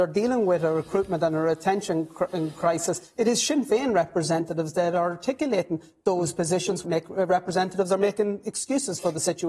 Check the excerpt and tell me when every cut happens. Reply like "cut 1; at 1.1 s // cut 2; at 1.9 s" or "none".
cut 1; at 6.8 s